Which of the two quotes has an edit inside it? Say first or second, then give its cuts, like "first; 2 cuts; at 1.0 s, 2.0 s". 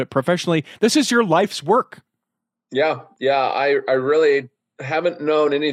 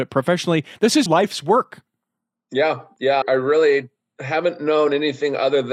second; 2 cuts; at 1.1 s, 3.2 s